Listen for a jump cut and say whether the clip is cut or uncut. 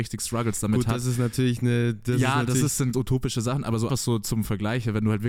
cut